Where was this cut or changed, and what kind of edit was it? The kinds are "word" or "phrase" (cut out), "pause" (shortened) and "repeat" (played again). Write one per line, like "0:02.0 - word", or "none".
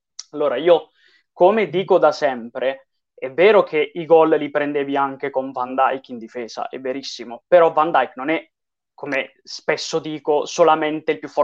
none